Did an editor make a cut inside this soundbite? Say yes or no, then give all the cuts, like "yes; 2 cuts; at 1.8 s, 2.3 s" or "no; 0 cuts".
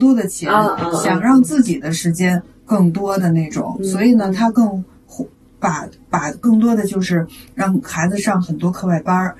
no; 0 cuts